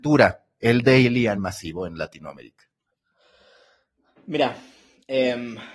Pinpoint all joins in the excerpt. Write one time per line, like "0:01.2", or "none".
0:01.4